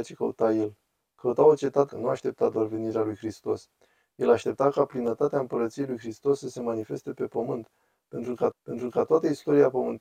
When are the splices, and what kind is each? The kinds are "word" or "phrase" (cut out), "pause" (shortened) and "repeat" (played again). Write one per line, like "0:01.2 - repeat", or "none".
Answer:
0:01.9 - word
0:08.5 - repeat